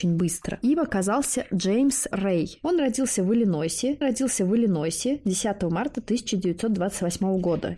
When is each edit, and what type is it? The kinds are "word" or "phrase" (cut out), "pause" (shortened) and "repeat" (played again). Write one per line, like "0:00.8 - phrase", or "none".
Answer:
0:02.1 - word
0:04.0 - repeat